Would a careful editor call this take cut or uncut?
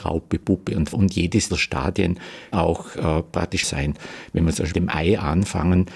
cut